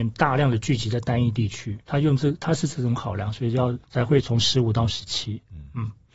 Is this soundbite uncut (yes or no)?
no